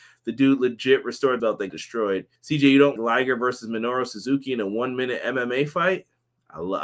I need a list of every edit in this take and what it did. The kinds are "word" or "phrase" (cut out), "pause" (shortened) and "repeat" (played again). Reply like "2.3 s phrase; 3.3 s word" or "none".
1.4 s phrase; 1.7 s word; 2.4 s pause; 3.0 s word